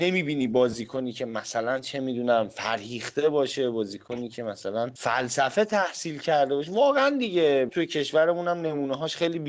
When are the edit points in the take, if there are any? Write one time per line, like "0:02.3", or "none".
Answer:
0:07.7